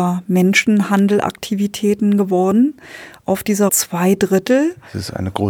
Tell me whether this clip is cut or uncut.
cut